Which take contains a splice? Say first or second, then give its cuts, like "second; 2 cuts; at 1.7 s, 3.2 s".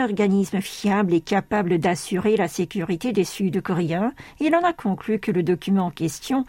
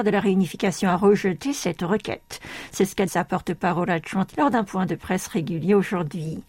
second; 2 cuts; at 3.1 s, 4.3 s